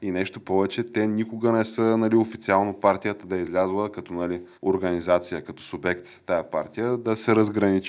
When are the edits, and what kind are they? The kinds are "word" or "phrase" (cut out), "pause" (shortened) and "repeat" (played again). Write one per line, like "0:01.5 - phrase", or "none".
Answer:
0:04.5 - pause